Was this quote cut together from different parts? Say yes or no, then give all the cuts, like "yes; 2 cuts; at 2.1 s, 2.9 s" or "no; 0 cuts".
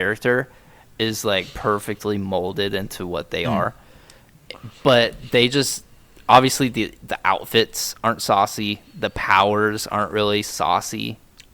no; 0 cuts